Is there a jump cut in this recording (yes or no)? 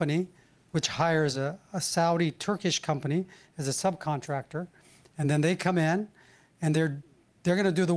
no